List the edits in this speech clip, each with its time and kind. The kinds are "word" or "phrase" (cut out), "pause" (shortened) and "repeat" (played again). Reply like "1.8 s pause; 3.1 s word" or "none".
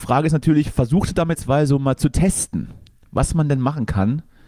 1.3 s word